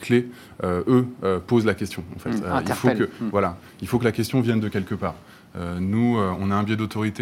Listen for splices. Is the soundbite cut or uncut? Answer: uncut